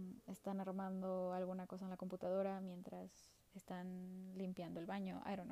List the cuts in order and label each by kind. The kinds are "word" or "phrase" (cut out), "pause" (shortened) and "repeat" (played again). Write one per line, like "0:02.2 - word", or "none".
none

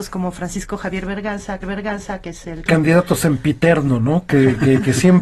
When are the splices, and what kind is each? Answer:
0:01.6 - repeat
0:02.7 - phrase

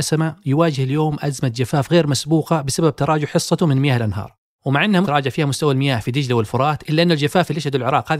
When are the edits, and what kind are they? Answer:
0:05.0 - phrase

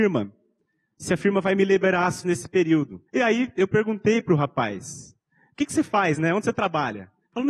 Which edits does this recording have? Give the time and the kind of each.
0:02.2 - word
0:03.1 - pause

